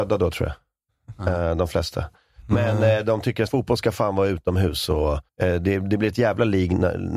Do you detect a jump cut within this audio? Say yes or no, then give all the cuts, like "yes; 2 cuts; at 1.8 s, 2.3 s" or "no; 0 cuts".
yes; 2 cuts; at 3.5 s, 5.3 s